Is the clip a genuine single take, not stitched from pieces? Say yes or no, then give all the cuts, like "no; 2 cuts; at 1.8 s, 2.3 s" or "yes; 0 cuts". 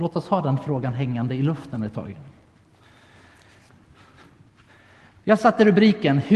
yes; 0 cuts